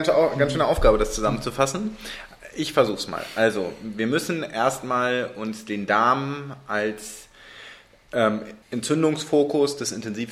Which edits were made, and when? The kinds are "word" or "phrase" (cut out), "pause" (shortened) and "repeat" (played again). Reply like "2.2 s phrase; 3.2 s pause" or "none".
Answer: 8.6 s pause